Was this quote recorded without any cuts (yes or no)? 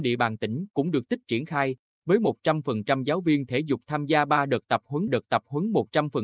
no